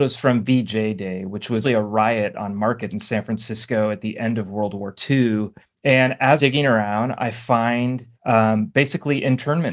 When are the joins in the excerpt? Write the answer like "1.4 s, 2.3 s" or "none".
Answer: 1.6 s, 2.9 s, 5.6 s, 6.4 s, 8.1 s

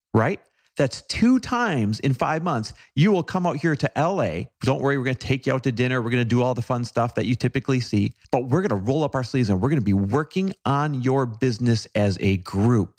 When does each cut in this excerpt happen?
4.5 s, 8.2 s

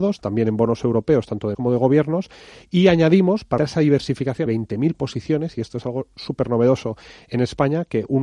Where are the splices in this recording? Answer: 1.5 s, 3.6 s, 4.5 s

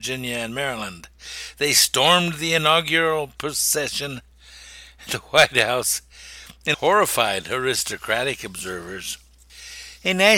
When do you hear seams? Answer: 5.1 s, 6.7 s

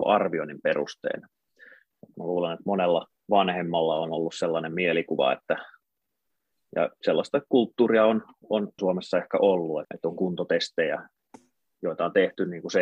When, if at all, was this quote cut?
3.2 s, 8.8 s, 9.8 s

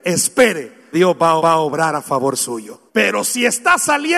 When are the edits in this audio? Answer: 0.9 s, 1.4 s, 2.9 s

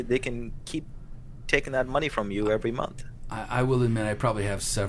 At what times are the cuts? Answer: none

